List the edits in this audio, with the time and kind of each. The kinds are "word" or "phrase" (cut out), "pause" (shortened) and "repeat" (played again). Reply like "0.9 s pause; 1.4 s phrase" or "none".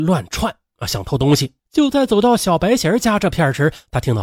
1.6 s pause